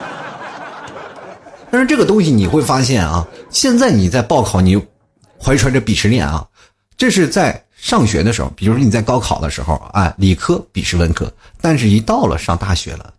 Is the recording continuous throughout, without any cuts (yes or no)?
yes